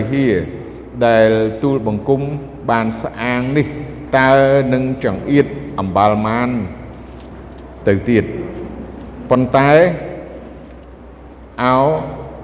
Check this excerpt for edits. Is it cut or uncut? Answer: cut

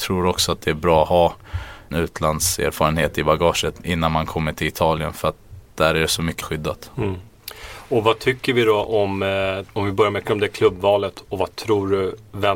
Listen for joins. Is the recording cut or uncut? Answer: cut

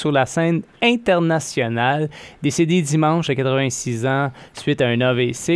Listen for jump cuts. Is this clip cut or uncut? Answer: cut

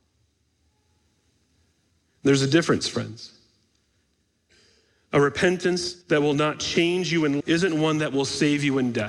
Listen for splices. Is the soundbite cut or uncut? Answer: cut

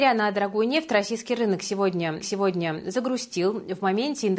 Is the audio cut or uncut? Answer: cut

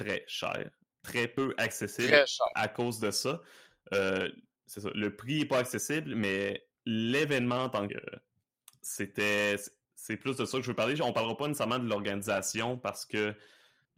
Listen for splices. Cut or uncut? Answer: cut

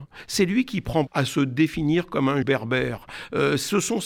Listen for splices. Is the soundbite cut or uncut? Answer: cut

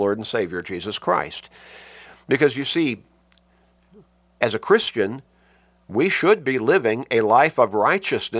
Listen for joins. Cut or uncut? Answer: uncut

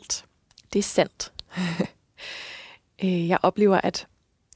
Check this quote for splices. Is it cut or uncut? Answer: uncut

